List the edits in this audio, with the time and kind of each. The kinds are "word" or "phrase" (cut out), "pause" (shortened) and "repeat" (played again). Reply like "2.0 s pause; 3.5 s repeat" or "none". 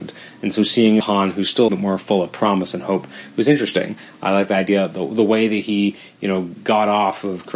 1.0 s word; 1.7 s phrase